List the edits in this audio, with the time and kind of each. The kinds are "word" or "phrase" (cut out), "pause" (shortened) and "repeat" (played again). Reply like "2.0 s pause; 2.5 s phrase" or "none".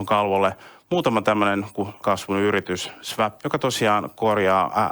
2.0 s word; 3.4 s word